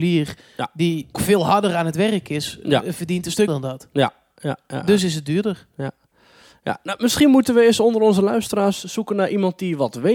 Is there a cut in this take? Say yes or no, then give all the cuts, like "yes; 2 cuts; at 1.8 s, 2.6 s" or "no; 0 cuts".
yes; 2 cuts; at 1.1 s, 3.5 s